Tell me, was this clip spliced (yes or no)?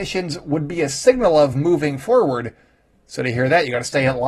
no